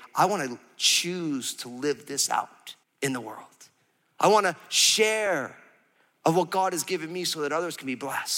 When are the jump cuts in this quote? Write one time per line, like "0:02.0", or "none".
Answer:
0:02.8